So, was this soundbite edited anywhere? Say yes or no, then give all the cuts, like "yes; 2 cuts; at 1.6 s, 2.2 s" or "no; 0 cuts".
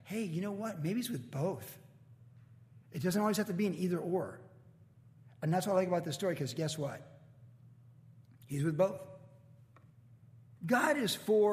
yes; 1 cut; at 2.8 s